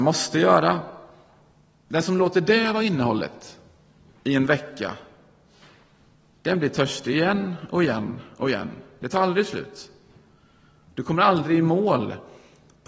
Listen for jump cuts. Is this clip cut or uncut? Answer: uncut